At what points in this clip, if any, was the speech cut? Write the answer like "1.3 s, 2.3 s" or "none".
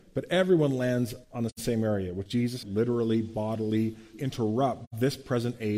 1.2 s, 2.3 s, 2.6 s, 4.1 s